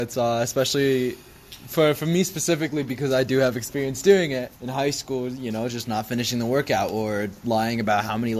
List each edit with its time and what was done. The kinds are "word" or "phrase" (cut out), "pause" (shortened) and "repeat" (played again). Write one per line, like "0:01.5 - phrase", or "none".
0:04.6 - pause

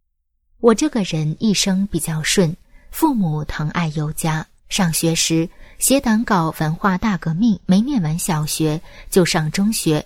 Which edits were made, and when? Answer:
0:04.6 - pause
0:07.6 - pause

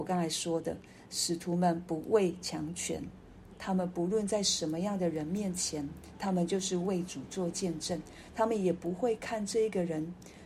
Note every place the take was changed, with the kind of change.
none

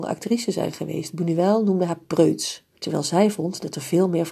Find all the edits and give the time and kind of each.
0:02.7 - pause

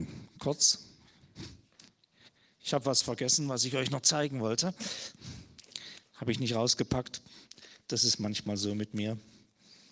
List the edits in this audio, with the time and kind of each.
none

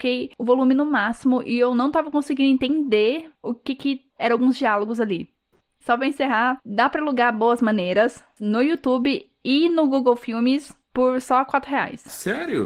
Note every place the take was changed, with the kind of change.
none

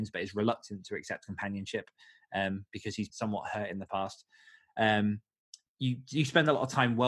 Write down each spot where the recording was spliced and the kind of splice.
0:03.1 - word
0:05.7 - phrase

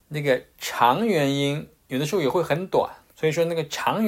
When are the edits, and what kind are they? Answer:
0:01.8 - pause
0:03.1 - pause

